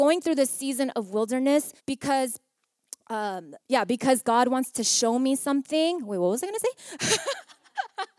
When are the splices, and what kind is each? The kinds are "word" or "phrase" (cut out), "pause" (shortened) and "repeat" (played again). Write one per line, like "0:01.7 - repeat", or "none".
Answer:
0:01.8 - pause
0:03.6 - pause